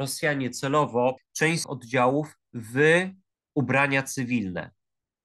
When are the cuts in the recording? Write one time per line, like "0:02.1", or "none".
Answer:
0:01.2
0:01.6
0:03.3